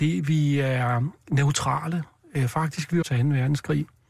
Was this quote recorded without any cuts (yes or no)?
no